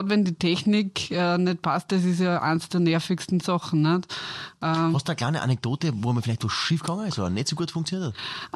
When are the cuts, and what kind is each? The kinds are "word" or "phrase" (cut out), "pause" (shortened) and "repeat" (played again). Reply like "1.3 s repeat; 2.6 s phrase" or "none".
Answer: none